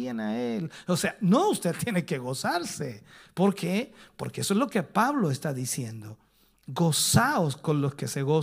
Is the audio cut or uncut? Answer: uncut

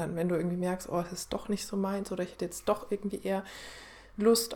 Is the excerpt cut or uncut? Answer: uncut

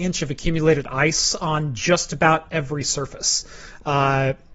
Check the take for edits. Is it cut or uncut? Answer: uncut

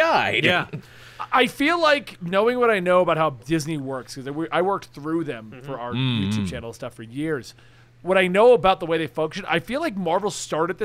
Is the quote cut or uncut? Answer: uncut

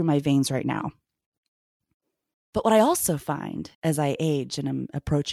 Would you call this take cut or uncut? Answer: cut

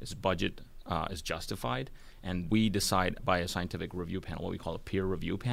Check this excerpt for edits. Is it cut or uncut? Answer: cut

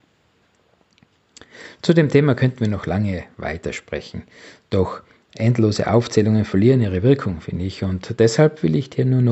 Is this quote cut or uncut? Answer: uncut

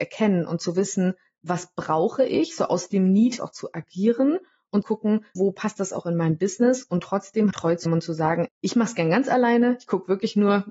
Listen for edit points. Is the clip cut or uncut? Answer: cut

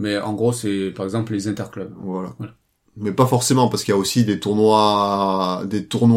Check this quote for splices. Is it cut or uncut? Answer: uncut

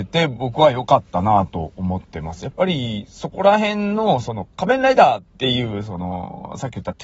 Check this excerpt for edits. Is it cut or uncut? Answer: cut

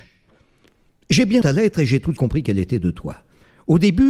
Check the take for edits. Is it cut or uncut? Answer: cut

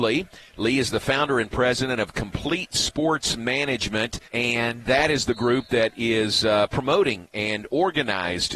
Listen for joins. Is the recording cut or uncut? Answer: cut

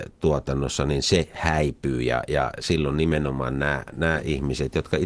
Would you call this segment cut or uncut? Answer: uncut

